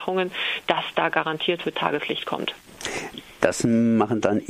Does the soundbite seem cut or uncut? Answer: cut